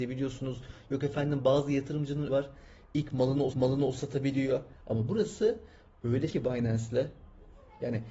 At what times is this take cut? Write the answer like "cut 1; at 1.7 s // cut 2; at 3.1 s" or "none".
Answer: cut 1; at 2.3 s // cut 2; at 3.5 s // cut 3; at 6.3 s

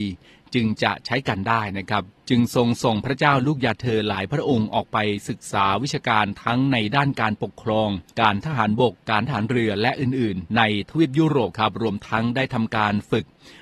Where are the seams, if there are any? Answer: cut 1; at 8.1 s // cut 2; at 10.5 s

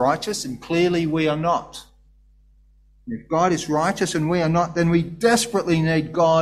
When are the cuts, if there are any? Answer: none

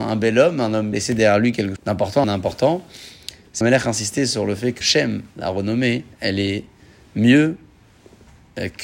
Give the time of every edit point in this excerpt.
cut 1; at 0.9 s // cut 2; at 1.8 s // cut 3; at 2.2 s // cut 4; at 3.6 s // cut 5; at 4.8 s // cut 6; at 5.3 s // cut 7; at 6.1 s

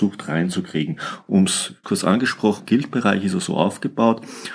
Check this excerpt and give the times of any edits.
cut 1; at 1.8 s // cut 2; at 2.6 s

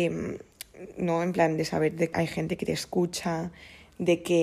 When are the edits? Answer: cut 1; at 2.1 s

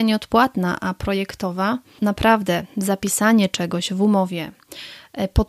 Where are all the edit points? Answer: cut 1; at 2.0 s

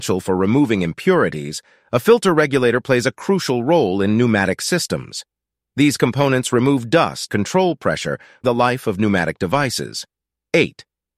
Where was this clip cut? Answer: cut 1; at 7.3 s // cut 2; at 8.4 s

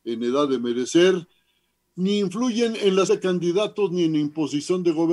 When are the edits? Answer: cut 1; at 3.1 s

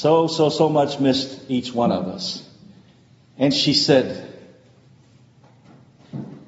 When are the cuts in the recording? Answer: none

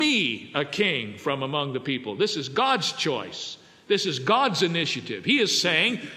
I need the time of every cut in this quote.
none

